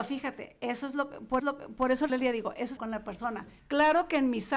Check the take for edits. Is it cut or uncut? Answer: cut